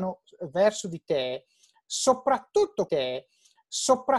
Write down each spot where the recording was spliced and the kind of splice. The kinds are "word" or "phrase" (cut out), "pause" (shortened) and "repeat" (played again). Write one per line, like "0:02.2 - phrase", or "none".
0:02.9 - repeat